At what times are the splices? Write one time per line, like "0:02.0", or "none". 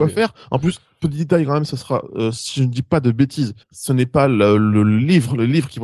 0:03.6